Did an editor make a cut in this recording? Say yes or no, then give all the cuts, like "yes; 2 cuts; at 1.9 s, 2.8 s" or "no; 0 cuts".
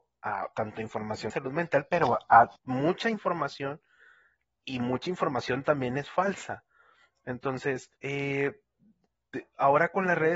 yes; 4 cuts; at 1.3 s, 2.6 s, 4.6 s, 8.0 s